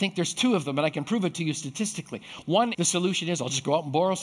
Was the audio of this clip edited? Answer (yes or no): yes